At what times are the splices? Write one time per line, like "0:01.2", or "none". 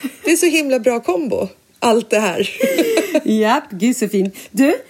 none